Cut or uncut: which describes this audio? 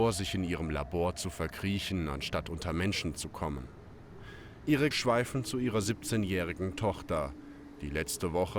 cut